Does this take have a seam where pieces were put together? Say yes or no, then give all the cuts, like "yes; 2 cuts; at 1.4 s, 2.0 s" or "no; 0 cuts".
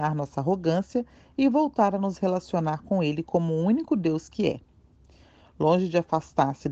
no; 0 cuts